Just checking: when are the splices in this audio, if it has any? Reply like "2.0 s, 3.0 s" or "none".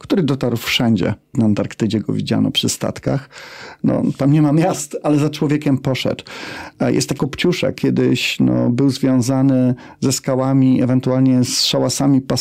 1.3 s, 5.0 s, 7.2 s, 7.8 s